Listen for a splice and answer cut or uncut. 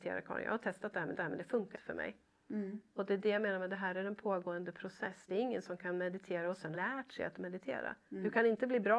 cut